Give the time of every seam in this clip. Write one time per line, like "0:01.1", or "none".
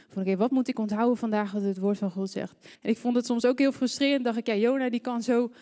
0:02.7